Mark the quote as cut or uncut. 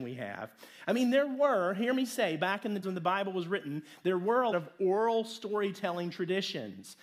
cut